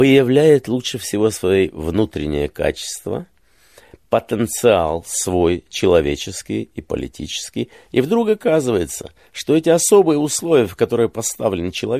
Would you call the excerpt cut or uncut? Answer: uncut